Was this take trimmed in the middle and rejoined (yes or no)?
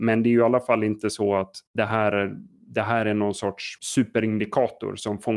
yes